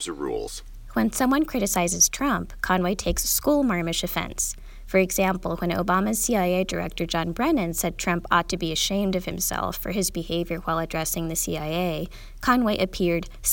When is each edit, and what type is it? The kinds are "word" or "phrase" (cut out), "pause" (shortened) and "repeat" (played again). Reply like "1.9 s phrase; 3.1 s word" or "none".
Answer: none